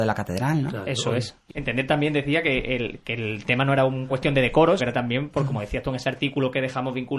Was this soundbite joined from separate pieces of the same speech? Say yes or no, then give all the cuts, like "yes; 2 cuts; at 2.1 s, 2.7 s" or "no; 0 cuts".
yes; 3 cuts; at 1.5 s, 4.1 s, 4.8 s